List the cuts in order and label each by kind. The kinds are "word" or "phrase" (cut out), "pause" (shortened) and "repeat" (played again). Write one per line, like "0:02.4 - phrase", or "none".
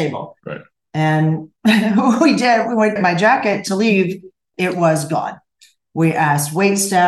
0:03.0 - phrase
0:04.5 - word

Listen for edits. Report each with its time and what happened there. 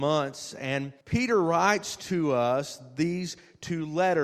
0:01.0 - pause

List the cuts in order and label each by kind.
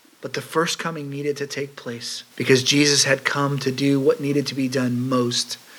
0:02.3 - pause

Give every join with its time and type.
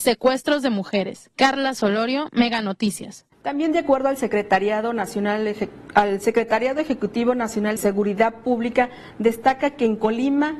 0:03.3 - pause
0:07.8 - word

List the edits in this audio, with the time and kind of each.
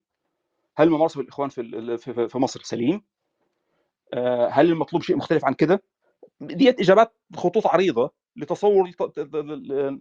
none

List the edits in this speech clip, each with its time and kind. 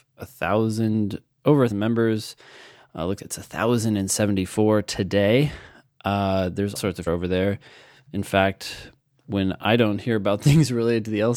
0:01.7 - word
0:03.2 - word
0:06.8 - word
0:07.1 - word

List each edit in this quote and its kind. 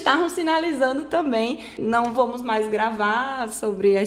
0:01.8 - word
0:02.1 - word

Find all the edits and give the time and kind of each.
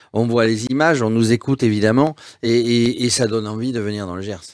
none

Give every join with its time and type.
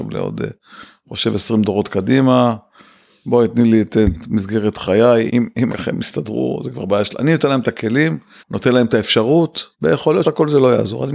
0:05.3 - word
0:05.7 - word
0:08.4 - pause
0:09.7 - pause
0:10.2 - word

